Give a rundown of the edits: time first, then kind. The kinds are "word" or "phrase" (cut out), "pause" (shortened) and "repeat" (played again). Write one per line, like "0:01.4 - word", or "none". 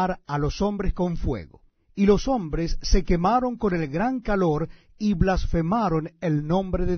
0:01.7 - pause